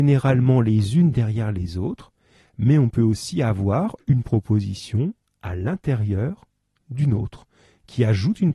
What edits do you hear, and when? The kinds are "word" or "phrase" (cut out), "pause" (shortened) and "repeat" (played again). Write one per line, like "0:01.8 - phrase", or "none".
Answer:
none